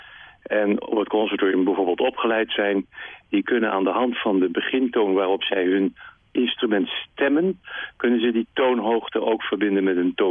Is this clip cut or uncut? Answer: uncut